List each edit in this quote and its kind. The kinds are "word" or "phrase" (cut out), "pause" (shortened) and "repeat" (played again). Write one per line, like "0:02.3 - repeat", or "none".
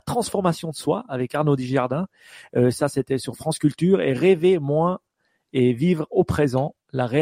none